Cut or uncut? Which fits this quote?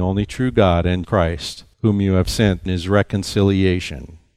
cut